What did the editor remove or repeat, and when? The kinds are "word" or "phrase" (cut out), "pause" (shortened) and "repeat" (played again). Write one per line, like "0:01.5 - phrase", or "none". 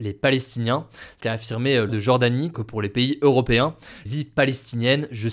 0:01.2 - phrase
0:01.9 - word
0:02.5 - phrase
0:04.1 - word